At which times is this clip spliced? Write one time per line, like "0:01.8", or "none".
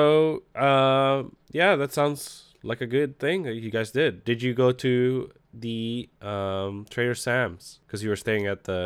none